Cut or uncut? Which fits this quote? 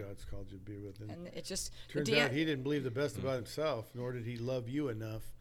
uncut